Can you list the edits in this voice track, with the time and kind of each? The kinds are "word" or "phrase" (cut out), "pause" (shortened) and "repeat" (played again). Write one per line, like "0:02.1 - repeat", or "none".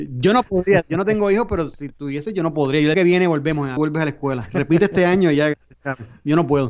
0:02.9 - phrase
0:03.8 - word